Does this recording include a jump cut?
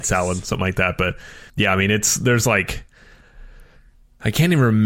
yes; 1 cut; at 1.5 s

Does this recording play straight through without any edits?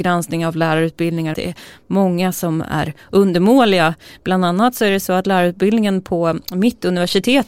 no; 1 cut; at 1.3 s

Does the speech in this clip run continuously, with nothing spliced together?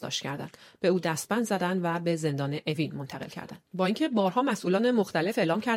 no; 1 cut; at 3.7 s

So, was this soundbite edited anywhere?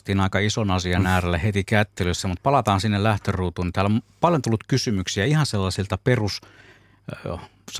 no; 0 cuts

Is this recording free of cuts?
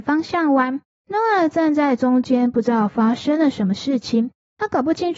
yes; 0 cuts

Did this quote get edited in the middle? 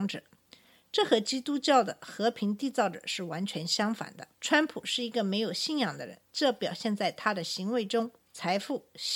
yes; 3 cuts; at 4.3 s, 6.2 s, 8.2 s

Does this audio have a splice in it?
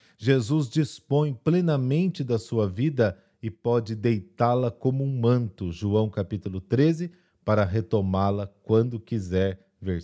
no; 0 cuts

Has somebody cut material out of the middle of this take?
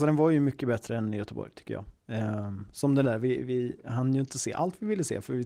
yes; 1 cut; at 3.0 s

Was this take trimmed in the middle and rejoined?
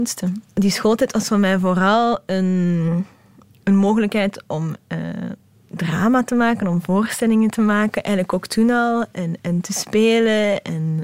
no; 0 cuts

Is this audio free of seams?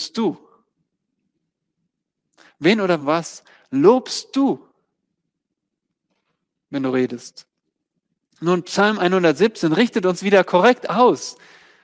yes; 0 cuts

